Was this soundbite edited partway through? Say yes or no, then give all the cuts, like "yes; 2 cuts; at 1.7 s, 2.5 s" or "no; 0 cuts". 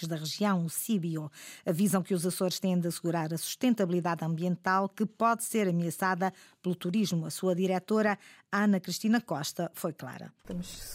no; 0 cuts